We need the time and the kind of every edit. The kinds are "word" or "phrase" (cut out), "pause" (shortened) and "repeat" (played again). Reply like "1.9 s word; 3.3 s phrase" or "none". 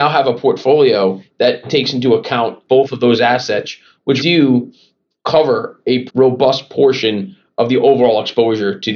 4.2 s word; 6.1 s word